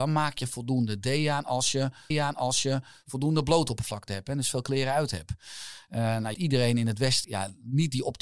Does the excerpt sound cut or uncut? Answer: cut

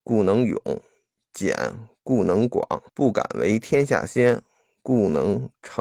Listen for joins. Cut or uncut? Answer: cut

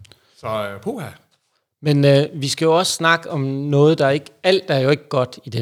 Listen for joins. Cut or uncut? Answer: uncut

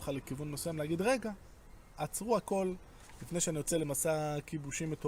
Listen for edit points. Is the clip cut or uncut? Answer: uncut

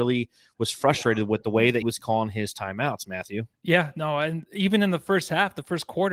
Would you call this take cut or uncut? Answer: cut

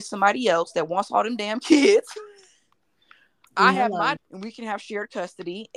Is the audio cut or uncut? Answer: cut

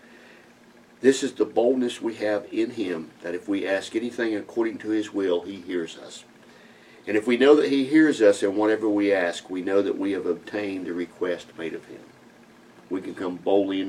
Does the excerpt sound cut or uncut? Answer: cut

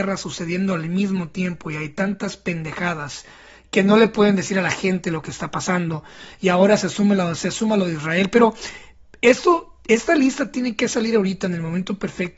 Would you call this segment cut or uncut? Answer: uncut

